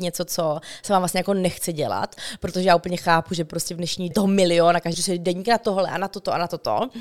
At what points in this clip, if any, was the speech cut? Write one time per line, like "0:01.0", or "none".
0:04.1
0:04.9